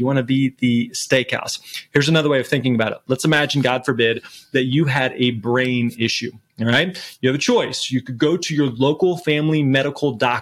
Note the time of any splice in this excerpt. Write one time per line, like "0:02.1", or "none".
none